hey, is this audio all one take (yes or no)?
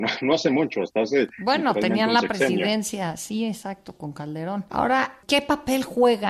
yes